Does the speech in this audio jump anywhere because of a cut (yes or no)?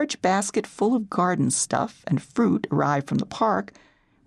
no